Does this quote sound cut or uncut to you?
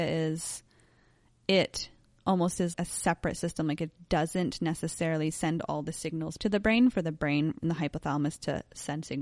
cut